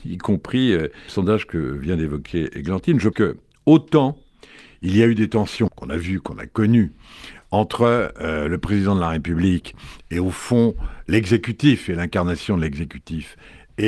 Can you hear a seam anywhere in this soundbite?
yes; 3 cuts; at 1.1 s, 3.1 s, 5.7 s

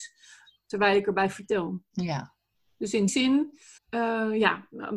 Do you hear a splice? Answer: yes; 3 cuts; at 1.9 s, 3.1 s, 3.8 s

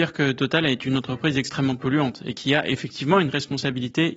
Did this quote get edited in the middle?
no; 0 cuts

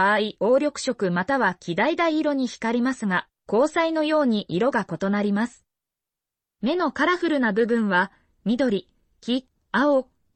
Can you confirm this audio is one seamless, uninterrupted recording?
yes; 0 cuts

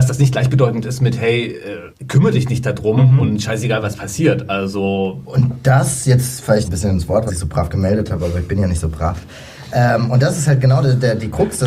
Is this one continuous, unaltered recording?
no; 3 cuts; at 1.9 s, 6.6 s, 7.3 s

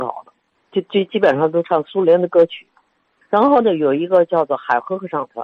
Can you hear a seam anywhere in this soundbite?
no; 0 cuts

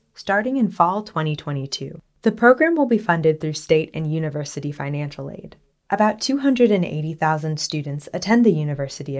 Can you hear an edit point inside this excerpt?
yes; 2 cuts; at 2.1 s, 5.7 s

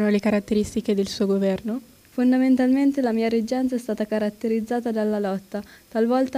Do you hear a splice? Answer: yes; 1 cut; at 2.0 s

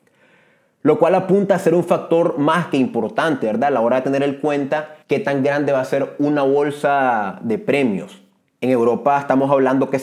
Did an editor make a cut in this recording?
yes; 2 cuts; at 5.0 s, 8.4 s

